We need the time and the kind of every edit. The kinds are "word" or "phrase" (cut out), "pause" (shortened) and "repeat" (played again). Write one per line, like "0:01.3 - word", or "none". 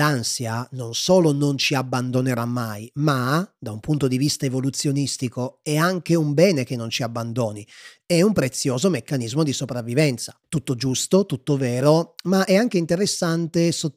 0:10.4 - pause